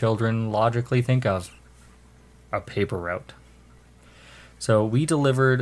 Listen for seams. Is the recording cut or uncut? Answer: uncut